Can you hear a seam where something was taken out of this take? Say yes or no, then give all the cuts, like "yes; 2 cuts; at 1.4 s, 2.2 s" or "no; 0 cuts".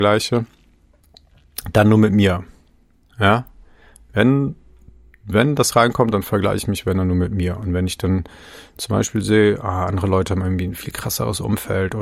no; 0 cuts